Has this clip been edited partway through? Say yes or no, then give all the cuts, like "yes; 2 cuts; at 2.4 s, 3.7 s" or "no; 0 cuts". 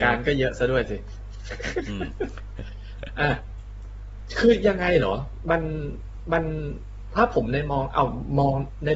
yes; 1 cut; at 6.3 s